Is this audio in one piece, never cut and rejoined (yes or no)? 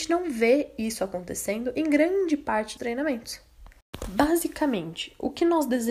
no